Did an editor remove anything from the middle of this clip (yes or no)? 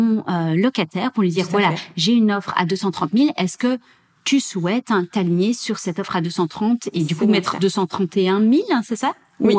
no